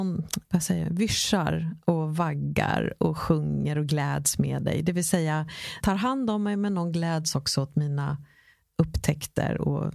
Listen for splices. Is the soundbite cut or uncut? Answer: cut